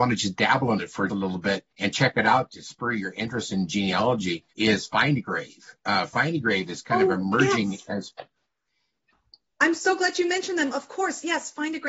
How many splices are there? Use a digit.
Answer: 3